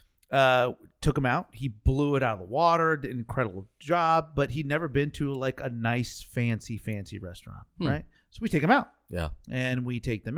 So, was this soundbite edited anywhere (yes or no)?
yes